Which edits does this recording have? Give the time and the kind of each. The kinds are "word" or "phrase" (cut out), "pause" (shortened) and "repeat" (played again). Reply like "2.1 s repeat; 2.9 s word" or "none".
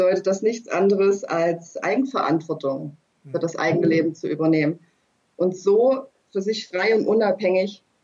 none